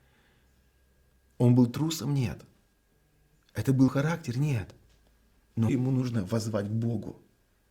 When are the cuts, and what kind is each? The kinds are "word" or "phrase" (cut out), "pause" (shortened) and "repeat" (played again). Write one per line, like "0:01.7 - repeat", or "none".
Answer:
0:02.7 - pause
0:03.9 - word
0:05.7 - phrase